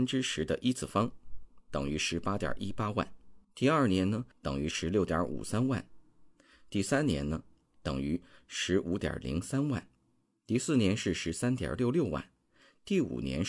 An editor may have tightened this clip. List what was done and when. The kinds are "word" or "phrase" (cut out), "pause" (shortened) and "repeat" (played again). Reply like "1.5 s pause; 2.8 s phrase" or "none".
3.4 s pause